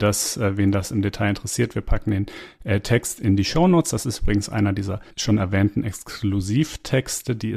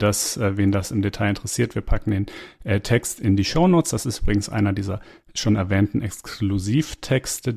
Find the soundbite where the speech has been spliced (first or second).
first